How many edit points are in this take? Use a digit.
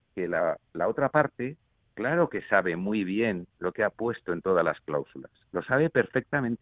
1